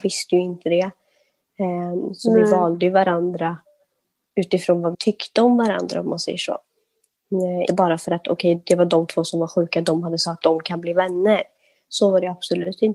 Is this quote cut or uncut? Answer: cut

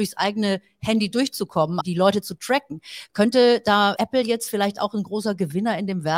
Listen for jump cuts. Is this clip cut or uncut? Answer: cut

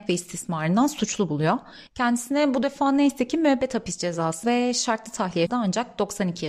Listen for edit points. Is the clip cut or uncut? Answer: cut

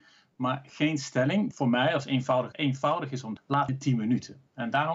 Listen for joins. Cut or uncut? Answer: cut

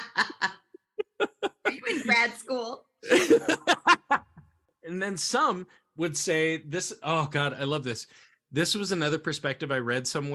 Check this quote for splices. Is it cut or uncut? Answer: uncut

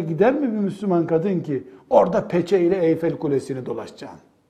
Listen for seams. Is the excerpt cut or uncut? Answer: uncut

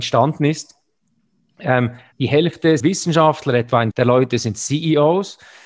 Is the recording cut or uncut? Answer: cut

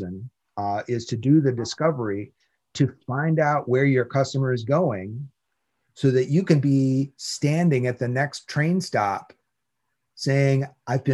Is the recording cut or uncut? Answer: uncut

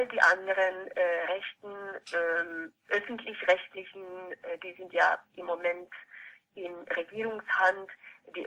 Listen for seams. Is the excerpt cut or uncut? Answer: uncut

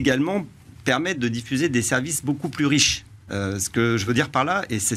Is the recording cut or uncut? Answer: uncut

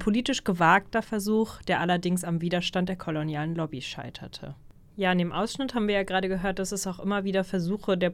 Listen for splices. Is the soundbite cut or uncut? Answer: uncut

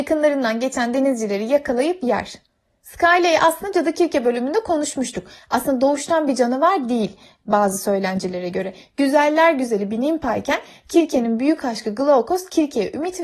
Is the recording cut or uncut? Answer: uncut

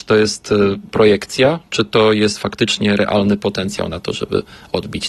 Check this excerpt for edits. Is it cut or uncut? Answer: uncut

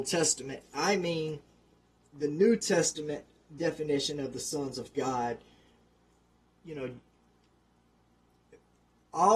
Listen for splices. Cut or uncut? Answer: uncut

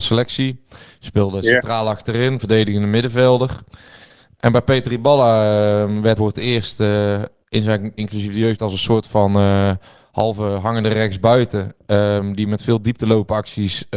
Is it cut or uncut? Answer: cut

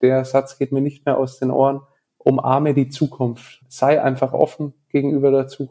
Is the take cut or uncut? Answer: cut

